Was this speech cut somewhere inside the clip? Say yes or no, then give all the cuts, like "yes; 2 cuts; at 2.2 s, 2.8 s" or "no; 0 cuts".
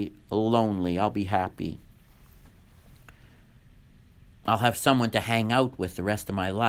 no; 0 cuts